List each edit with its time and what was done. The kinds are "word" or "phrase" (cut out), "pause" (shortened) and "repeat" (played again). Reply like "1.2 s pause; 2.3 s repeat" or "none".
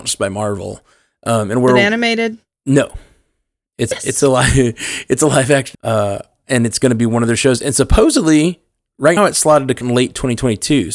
3.9 s word; 5.7 s word; 9.2 s word; 9.8 s word